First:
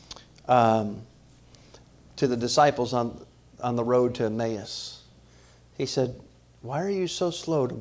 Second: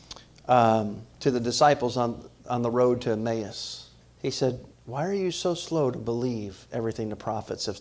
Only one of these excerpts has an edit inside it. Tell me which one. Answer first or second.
second